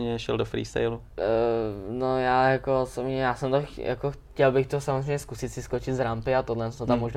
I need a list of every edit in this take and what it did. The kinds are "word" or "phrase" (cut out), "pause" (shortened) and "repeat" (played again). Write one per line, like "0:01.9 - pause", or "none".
none